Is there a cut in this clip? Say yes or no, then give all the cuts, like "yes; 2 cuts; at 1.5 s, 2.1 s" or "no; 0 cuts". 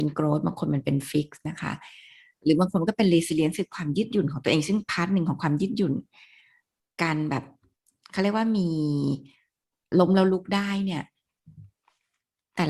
no; 0 cuts